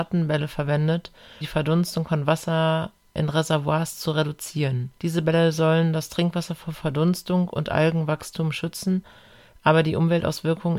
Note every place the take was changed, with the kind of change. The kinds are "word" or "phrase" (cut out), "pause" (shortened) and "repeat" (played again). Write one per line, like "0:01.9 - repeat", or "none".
0:01.4 - word
0:05.0 - pause